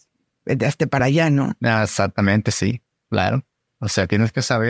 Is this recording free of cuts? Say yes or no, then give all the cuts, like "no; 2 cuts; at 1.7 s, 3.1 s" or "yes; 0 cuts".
yes; 0 cuts